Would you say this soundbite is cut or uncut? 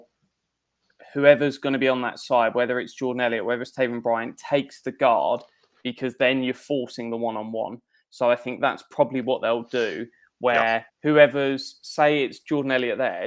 cut